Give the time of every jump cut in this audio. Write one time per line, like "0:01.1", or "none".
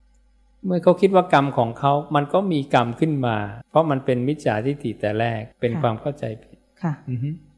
0:03.6
0:05.5